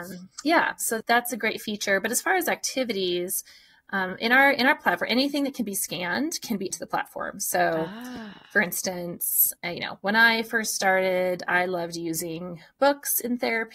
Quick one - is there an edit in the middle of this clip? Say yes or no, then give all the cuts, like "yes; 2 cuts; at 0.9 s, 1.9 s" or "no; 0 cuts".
yes; 2 cuts; at 1.0 s, 6.7 s